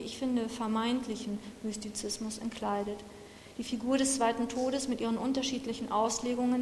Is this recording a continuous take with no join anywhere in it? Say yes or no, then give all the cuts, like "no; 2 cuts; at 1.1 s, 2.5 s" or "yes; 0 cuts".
yes; 0 cuts